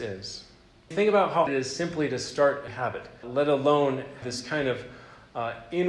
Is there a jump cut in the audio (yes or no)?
yes